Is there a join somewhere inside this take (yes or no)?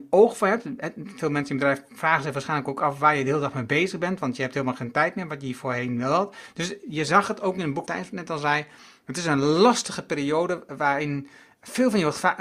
yes